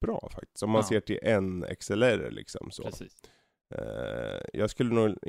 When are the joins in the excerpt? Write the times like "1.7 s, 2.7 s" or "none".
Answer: none